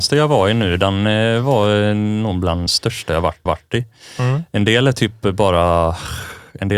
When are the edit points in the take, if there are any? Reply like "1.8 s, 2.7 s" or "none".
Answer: 2.7 s, 3.5 s